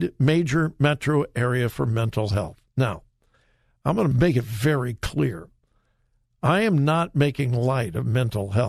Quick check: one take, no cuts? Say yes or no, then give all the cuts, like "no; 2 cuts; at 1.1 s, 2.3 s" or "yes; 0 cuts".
no; 1 cut; at 4.1 s